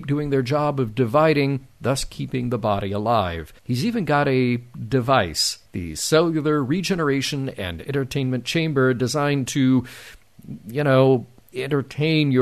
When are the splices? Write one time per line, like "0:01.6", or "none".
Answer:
0:03.6
0:05.6